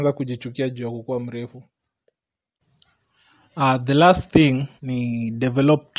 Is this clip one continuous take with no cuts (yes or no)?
no